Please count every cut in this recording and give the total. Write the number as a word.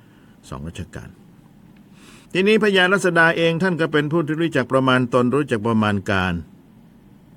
one